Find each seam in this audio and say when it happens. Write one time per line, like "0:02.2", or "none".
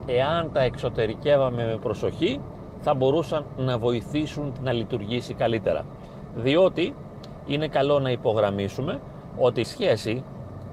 0:04.6
0:09.6